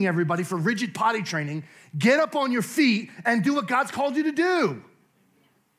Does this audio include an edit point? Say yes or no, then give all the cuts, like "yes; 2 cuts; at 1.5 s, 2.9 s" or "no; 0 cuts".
no; 0 cuts